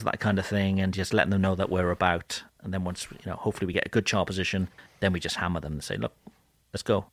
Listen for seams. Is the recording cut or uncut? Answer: uncut